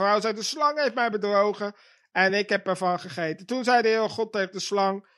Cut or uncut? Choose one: uncut